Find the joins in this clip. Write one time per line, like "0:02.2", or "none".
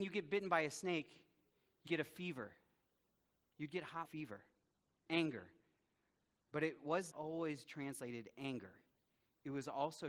0:01.9
0:04.0
0:05.1
0:07.1
0:07.7